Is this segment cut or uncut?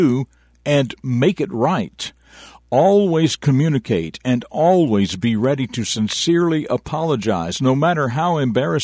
uncut